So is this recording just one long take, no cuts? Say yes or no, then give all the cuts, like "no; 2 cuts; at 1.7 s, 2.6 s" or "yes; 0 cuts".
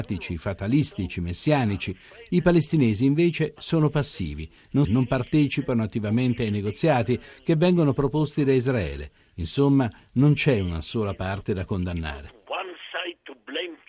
no; 1 cut; at 4.8 s